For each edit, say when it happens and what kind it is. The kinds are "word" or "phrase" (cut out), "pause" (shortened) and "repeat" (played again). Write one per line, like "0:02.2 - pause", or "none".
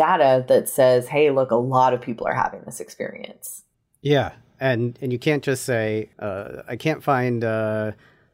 none